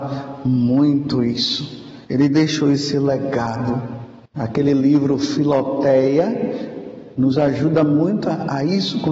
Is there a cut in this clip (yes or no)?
yes